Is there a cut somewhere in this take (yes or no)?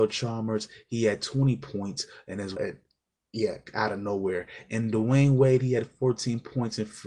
yes